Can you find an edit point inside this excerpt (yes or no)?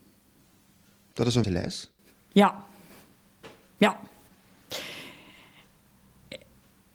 yes